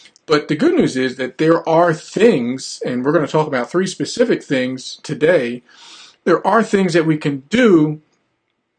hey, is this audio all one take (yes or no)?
yes